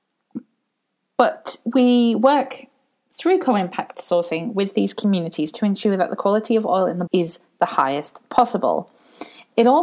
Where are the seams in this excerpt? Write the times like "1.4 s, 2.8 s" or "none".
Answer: 7.1 s